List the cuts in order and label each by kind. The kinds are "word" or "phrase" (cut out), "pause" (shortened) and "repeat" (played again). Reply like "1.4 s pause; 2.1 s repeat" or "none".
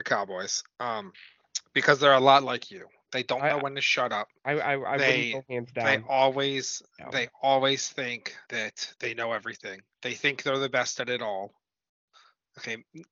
4.4 s pause; 6.9 s pause; 8.4 s pause; 9.9 s pause